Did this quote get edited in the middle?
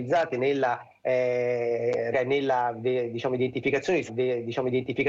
yes; 2 cuts; at 2.1 s, 4.1 s

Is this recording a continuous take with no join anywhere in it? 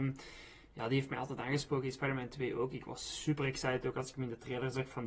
yes; 0 cuts

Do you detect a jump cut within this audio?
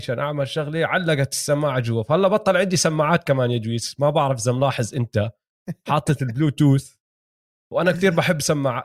no; 0 cuts

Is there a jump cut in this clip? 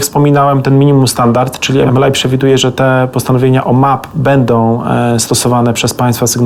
no; 0 cuts

